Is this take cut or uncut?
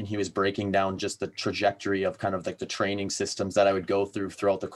uncut